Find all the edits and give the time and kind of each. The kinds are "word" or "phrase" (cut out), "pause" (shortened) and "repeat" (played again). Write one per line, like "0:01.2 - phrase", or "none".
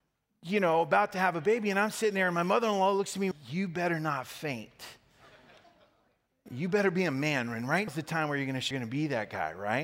0:03.3 - word
0:07.9 - word
0:08.7 - word